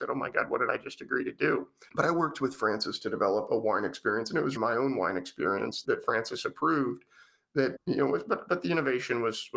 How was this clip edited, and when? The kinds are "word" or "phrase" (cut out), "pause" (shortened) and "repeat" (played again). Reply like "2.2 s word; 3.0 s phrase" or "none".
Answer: 3.5 s word; 4.6 s word; 5.8 s word